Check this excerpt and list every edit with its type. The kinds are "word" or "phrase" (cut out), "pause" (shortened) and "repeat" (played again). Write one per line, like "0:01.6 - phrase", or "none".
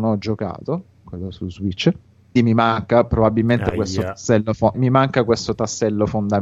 0:02.4 - word
0:04.7 - word

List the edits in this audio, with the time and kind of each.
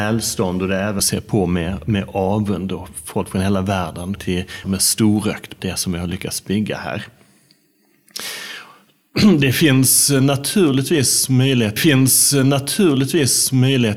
0:01.0 - phrase
0:04.2 - word
0:04.6 - phrase
0:05.6 - word
0:11.8 - repeat

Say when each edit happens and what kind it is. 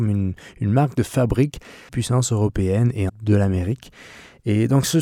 0:01.9 - word
0:03.1 - word

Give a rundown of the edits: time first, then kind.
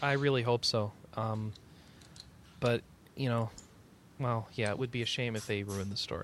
none

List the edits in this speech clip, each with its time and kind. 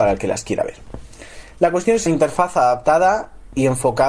0:02.1 - phrase

